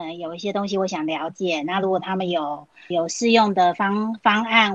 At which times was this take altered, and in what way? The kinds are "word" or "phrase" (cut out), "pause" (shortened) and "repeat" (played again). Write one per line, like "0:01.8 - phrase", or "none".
0:02.9 - word